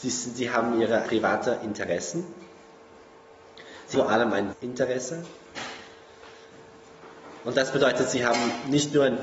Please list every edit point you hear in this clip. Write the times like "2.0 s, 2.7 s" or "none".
1.1 s, 3.9 s, 4.5 s